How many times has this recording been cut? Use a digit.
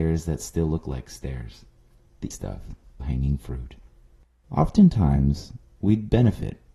3